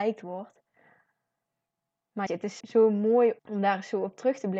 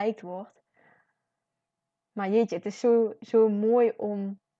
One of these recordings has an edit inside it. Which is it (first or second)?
first